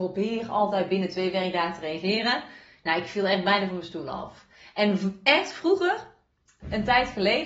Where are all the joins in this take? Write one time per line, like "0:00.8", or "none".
none